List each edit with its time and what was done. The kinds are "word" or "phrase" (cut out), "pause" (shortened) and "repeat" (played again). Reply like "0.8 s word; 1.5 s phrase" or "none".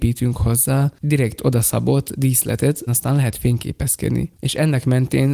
1.0 s word; 2.9 s word